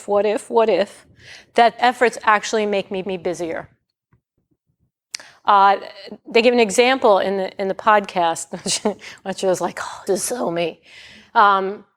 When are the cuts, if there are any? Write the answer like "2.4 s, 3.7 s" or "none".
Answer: 1.8 s, 3.0 s, 10.1 s